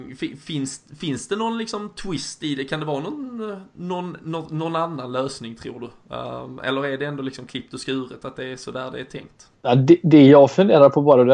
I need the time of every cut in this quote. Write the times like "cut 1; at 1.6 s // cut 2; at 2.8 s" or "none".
cut 1; at 9.6 s